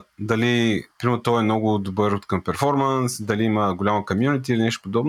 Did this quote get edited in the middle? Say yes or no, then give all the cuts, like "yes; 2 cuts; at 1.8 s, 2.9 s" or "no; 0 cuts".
no; 0 cuts